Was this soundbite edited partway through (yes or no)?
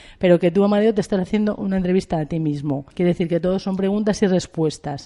yes